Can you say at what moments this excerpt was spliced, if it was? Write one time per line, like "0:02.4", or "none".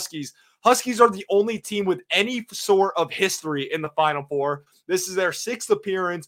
none